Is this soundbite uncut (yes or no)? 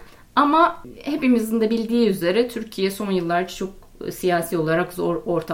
yes